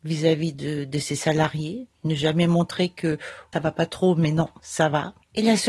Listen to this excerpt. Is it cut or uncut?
cut